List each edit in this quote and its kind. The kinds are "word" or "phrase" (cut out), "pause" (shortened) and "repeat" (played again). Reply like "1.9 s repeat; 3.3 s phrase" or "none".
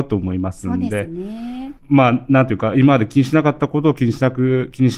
1.8 s pause

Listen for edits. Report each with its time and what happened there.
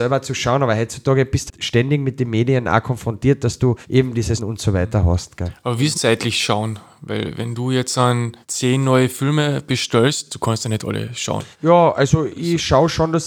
1.5 s word; 3.8 s pause; 4.4 s word; 5.9 s word; 8.4 s pause; 11.5 s pause

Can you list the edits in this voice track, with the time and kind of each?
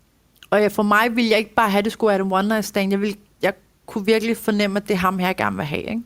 none

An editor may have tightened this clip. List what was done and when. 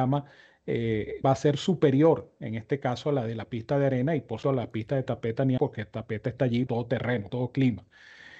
1.2 s word; 4.4 s word; 5.6 s word; 6.7 s word; 7.3 s word

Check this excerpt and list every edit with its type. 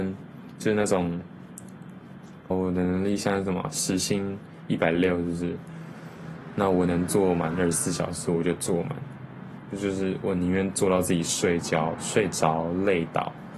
2.5 s word

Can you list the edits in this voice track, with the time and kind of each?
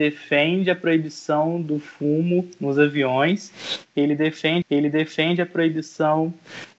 4.6 s repeat

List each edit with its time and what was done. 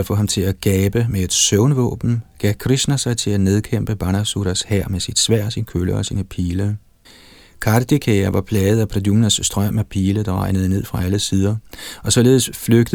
7.0 s pause

